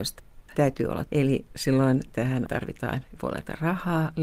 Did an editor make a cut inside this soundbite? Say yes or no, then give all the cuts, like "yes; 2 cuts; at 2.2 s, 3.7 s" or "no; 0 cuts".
yes; 3 cuts; at 1.1 s, 2.5 s, 3.1 s